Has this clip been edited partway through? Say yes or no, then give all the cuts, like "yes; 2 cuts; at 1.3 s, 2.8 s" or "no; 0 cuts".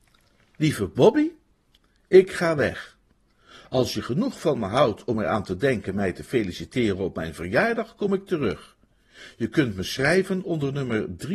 no; 0 cuts